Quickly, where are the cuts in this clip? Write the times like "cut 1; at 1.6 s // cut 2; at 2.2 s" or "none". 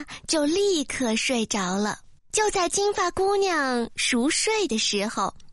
cut 1; at 2.2 s